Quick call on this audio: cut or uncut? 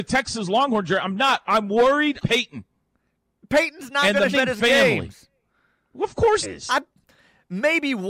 cut